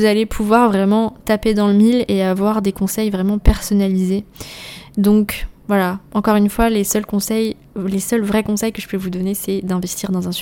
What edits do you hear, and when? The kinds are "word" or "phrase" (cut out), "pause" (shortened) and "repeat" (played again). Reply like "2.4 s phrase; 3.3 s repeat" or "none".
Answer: none